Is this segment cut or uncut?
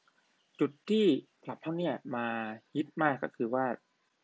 cut